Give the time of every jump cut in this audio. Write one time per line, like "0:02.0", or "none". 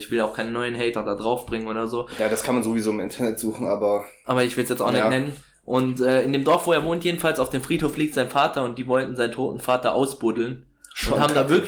none